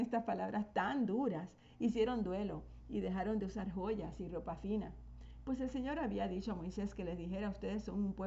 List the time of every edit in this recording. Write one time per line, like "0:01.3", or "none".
none